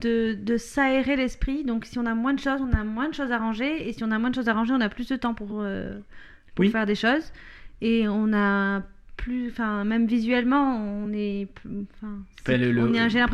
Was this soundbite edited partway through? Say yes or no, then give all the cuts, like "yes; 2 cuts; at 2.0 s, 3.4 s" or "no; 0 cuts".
no; 0 cuts